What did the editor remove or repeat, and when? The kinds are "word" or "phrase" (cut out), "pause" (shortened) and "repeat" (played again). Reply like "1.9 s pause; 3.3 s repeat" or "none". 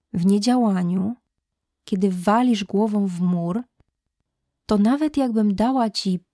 none